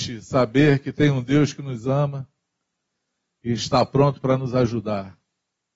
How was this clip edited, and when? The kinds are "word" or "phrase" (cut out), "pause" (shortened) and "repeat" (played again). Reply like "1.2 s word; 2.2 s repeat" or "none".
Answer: none